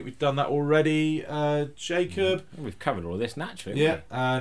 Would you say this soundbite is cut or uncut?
uncut